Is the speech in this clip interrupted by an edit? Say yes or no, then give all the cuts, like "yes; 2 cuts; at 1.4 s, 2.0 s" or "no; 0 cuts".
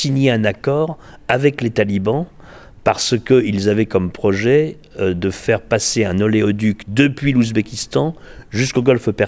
no; 0 cuts